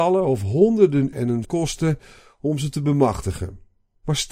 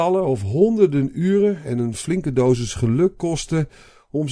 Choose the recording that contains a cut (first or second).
first